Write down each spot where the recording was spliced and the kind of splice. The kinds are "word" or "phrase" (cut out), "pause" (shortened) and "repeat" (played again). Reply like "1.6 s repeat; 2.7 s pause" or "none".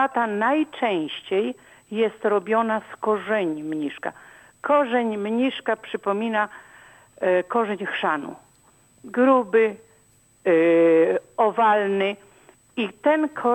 none